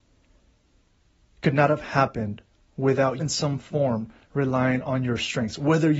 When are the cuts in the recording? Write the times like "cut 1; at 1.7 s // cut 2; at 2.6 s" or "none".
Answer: cut 1; at 3.2 s